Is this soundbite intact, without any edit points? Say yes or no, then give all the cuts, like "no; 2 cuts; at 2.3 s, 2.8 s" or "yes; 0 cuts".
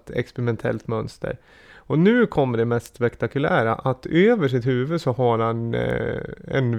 yes; 0 cuts